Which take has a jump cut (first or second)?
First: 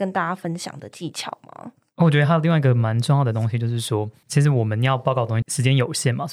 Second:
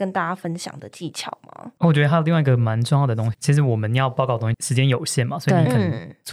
second